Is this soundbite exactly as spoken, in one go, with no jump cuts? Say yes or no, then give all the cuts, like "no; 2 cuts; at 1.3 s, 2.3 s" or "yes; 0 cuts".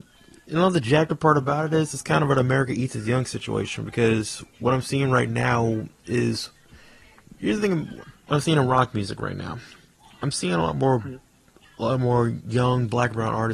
yes; 0 cuts